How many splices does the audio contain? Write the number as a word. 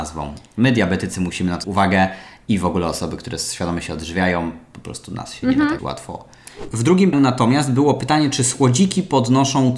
three